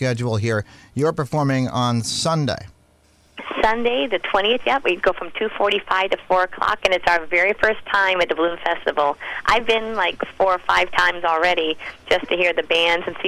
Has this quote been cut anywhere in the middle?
no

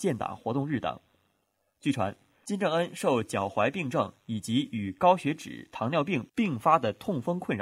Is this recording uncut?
yes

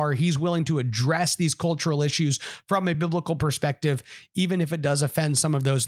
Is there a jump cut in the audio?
no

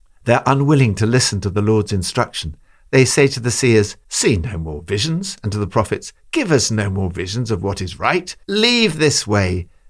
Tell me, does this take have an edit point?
yes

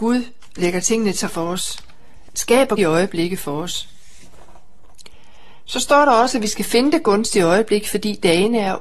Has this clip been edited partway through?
yes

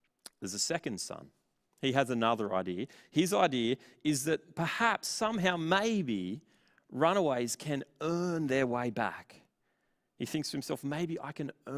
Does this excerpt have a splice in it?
no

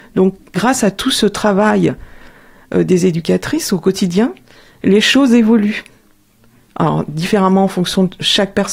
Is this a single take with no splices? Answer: yes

